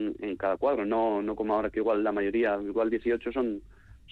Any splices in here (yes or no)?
no